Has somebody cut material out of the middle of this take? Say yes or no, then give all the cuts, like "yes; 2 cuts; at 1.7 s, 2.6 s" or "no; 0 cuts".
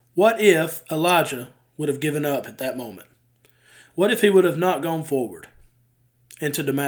no; 0 cuts